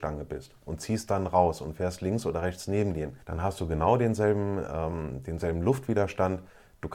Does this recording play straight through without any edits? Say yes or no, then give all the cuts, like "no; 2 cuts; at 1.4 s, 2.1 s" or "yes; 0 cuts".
no; 1 cut; at 3.2 s